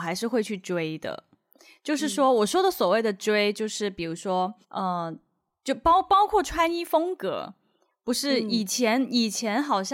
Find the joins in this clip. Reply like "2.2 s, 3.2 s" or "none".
4.6 s